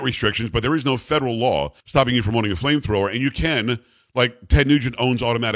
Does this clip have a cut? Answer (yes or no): yes